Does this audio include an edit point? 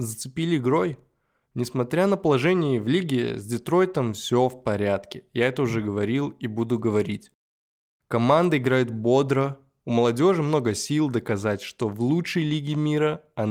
no; 0 cuts

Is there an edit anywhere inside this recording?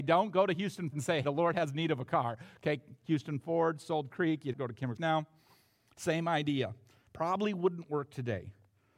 yes; 5 cuts; at 0.9 s, 1.2 s, 4.1 s, 4.5 s, 5.0 s

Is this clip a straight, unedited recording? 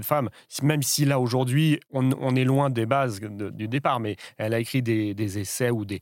yes; 0 cuts

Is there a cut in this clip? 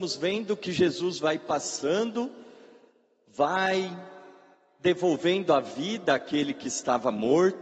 no; 0 cuts

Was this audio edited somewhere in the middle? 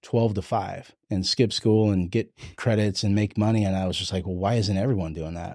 yes; 1 cut; at 1.0 s

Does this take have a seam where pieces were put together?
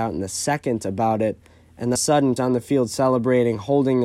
yes; 2 cuts; at 2.0 s, 2.4 s

